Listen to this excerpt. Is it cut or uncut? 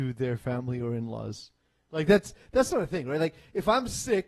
uncut